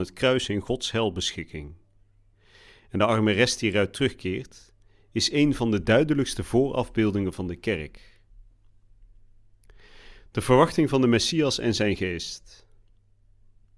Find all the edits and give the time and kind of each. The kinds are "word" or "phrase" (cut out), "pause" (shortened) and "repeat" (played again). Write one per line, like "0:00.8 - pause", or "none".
none